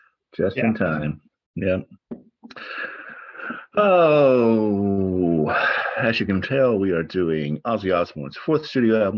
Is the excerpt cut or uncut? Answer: uncut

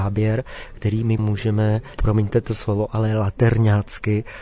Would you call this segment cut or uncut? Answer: cut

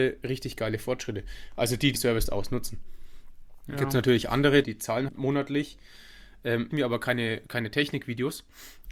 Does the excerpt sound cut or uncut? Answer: cut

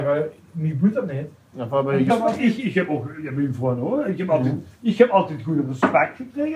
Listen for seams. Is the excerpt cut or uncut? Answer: uncut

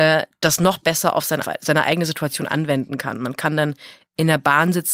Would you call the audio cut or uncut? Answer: cut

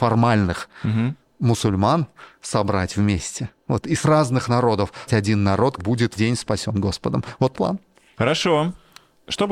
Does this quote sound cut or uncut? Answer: cut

